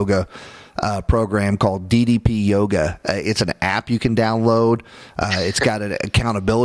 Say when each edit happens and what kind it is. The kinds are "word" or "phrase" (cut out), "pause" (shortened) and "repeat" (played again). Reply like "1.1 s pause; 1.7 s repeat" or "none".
none